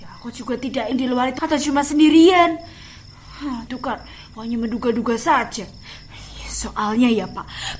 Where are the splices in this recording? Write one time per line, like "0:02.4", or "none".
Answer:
0:00.9
0:01.4
0:03.7
0:04.3